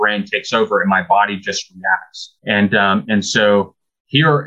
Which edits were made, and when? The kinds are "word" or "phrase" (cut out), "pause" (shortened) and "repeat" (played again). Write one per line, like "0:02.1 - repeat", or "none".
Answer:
0:02.4 - pause